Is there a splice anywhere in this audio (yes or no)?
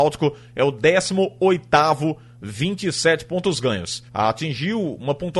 yes